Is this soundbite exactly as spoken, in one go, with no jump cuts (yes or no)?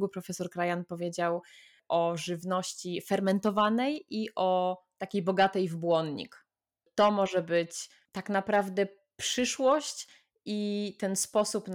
yes